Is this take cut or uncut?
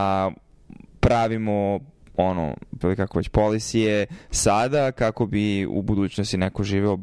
cut